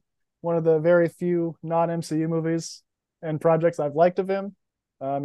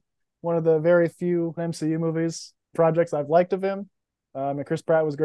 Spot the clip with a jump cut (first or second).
second